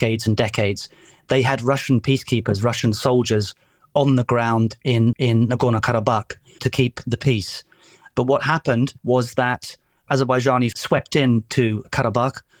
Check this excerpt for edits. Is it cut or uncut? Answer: cut